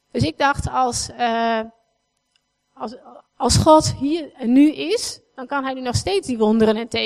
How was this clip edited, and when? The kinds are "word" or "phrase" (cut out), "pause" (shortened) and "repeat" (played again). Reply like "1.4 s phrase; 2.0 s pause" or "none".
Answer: 3.3 s pause